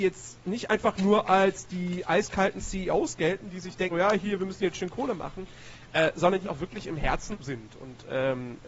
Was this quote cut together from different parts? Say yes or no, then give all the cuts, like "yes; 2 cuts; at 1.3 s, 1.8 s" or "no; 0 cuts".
yes; 3 cuts; at 3.9 s, 6.4 s, 7.3 s